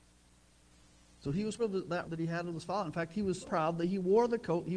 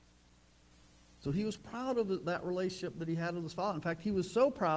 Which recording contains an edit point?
first; 3 cuts; at 1.6 s, 2.0 s, 3.4 s

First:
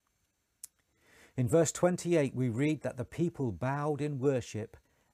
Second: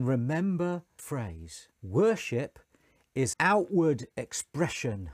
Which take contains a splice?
second; 3 cuts; at 1.0 s, 1.7 s, 3.3 s

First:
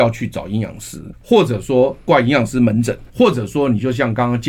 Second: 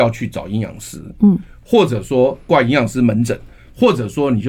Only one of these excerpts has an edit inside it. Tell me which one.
first; 2 cuts; at 1.1 s, 3.1 s

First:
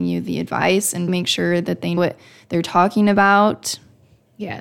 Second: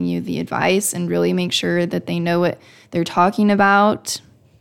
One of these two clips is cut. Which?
first; 2 cuts; at 1.1 s, 2.0 s

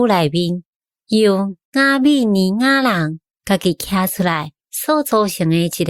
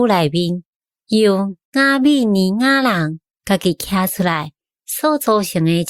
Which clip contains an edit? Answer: first; 1 cut; at 4.6 s

